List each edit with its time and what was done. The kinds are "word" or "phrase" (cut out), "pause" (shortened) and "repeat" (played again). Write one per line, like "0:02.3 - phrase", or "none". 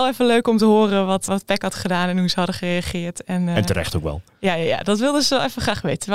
0:01.3 - word

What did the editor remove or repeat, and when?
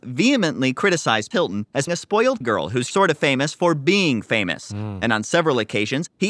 0:01.3 - word
0:01.9 - word
0:02.4 - word
0:02.9 - word

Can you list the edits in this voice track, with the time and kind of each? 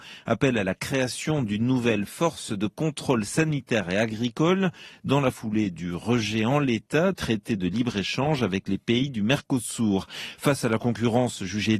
0:07.1 - word

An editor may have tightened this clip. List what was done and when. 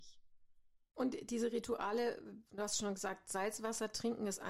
none

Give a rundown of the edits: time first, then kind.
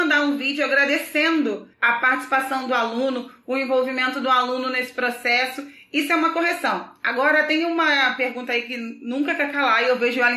0:01.7 - pause

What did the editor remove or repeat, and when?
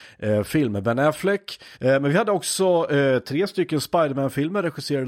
0:01.7 - pause

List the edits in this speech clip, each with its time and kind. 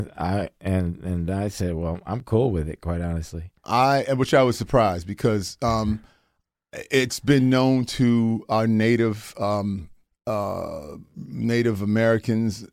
0:10.1 - pause

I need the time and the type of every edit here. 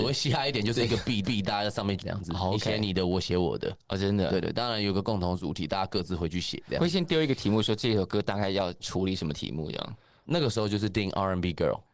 0:01.2 - repeat
0:02.0 - word

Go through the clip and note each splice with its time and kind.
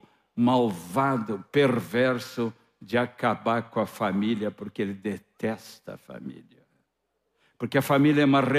none

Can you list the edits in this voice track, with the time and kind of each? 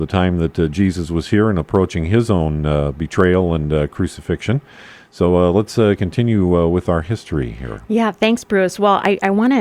none

